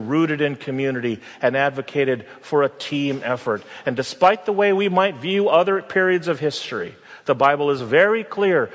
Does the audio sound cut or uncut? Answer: uncut